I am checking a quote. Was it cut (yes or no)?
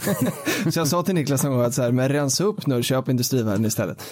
no